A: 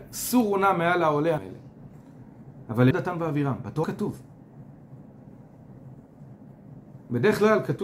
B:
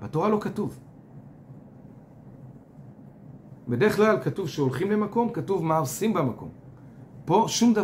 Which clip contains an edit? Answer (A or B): A